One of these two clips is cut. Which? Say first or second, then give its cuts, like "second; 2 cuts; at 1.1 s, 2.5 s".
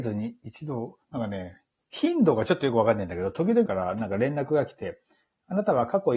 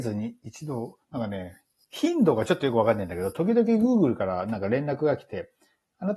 first; 1 cut; at 3.7 s